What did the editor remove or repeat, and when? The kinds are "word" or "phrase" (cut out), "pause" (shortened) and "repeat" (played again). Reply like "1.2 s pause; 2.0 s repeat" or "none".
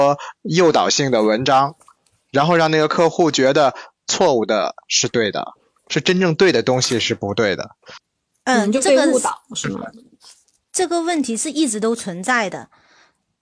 none